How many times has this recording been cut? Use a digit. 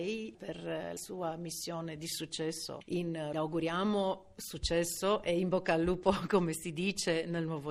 2